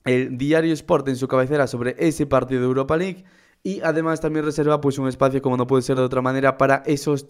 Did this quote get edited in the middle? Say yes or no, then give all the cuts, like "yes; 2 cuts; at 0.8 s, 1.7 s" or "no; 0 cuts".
no; 0 cuts